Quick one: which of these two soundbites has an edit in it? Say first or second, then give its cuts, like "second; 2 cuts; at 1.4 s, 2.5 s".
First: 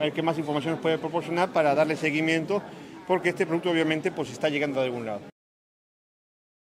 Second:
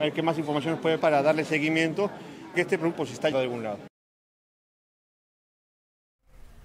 second; 4 cuts; at 1.0 s, 2.5 s, 2.9 s, 3.3 s